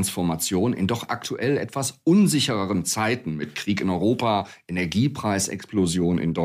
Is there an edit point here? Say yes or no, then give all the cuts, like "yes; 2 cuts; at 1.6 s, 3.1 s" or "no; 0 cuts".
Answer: no; 0 cuts